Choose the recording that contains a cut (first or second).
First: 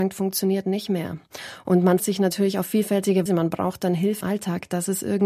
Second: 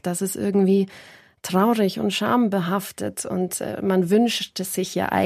first